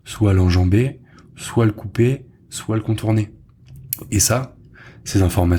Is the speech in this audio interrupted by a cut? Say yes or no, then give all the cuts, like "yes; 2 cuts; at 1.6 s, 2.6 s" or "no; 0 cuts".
no; 0 cuts